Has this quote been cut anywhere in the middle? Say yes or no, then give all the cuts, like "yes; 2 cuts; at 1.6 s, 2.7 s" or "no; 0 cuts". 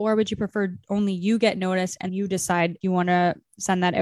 yes; 2 cuts; at 2.1 s, 2.8 s